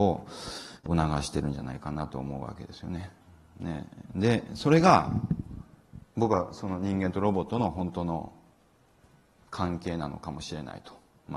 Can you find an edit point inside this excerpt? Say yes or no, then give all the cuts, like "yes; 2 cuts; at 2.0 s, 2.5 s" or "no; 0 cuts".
no; 0 cuts